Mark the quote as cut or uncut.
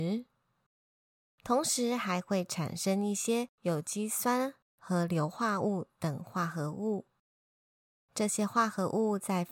cut